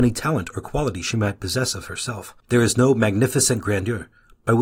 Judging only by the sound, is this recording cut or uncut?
cut